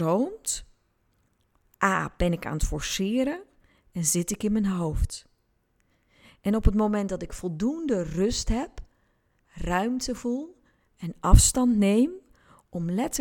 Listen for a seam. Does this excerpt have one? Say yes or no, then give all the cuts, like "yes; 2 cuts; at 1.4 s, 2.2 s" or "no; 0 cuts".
no; 0 cuts